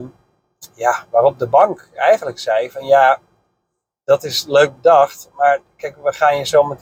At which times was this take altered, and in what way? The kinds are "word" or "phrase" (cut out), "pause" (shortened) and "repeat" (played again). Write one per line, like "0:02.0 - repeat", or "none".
none